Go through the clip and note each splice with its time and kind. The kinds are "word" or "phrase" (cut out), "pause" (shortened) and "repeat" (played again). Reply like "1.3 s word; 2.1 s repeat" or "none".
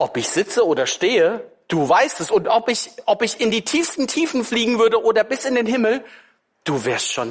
none